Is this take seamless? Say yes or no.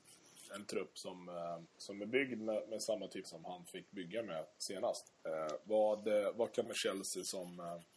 no